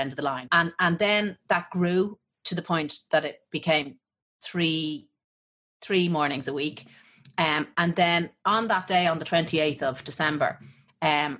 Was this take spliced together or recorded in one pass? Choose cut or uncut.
uncut